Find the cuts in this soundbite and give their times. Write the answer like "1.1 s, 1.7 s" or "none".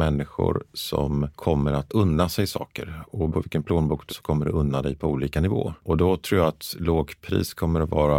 1.9 s, 3.3 s, 4.1 s